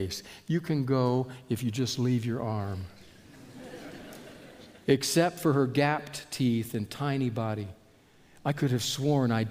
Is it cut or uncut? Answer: uncut